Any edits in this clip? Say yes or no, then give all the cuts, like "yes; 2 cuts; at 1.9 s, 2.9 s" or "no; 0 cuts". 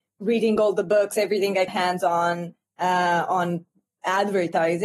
yes; 1 cut; at 1.7 s